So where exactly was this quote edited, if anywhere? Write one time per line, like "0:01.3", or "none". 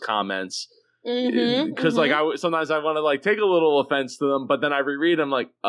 none